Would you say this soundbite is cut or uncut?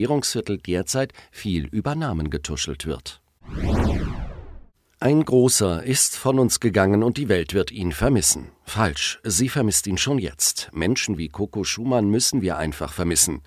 uncut